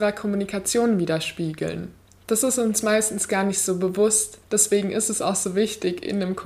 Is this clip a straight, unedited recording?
no; 2 cuts; at 2.0 s, 4.4 s

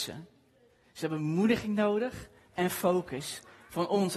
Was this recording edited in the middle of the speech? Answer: no; 0 cuts

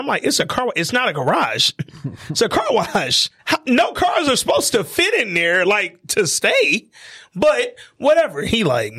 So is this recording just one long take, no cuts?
no; 1 cut; at 3.4 s

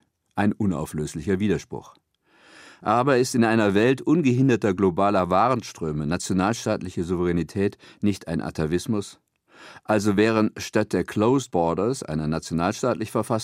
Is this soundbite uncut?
yes; 0 cuts

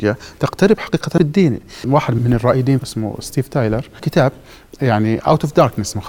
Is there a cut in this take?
yes; 5 cuts; at 1.2 s, 1.8 s, 2.2 s, 2.8 s, 4.0 s

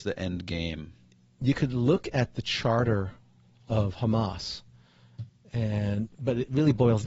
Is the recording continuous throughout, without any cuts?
yes; 0 cuts

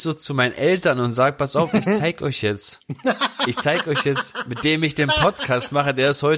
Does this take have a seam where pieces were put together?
no; 0 cuts

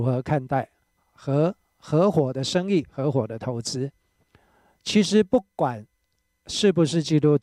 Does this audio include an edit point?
no; 0 cuts

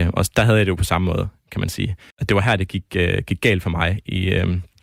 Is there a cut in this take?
yes; 1 cut; at 2.1 s

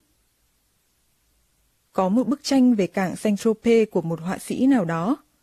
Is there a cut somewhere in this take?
no; 0 cuts

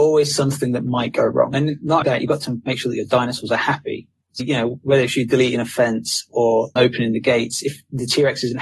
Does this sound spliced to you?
yes; 3 cuts; at 2.0 s, 4.4 s, 6.8 s

